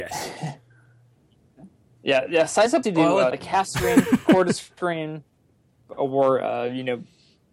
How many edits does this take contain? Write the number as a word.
two